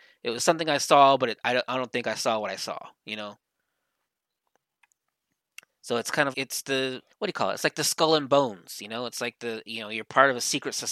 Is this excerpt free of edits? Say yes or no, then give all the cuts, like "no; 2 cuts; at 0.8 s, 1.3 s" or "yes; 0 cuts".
no; 2 cuts; at 6.3 s, 7.1 s